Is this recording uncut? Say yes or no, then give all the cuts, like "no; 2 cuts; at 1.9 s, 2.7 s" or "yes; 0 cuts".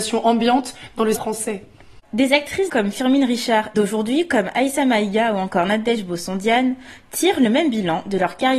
no; 3 cuts; at 1.2 s, 2.7 s, 3.7 s